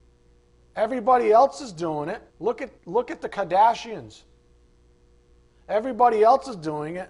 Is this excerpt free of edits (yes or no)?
no